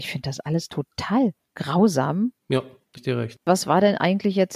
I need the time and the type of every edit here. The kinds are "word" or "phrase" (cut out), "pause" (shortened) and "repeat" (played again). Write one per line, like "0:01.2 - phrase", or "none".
0:02.4 - pause
0:03.0 - word
0:03.4 - pause